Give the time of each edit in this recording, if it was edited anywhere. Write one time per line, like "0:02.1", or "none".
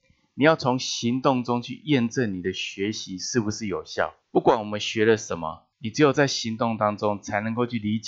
0:04.2
0:05.7